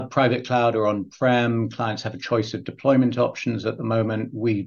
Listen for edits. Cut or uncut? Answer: uncut